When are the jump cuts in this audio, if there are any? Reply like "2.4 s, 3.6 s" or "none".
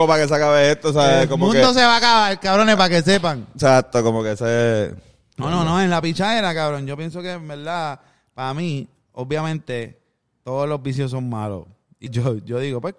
12.1 s